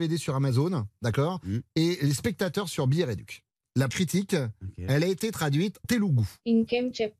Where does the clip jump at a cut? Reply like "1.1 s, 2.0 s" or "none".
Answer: 3.9 s, 5.8 s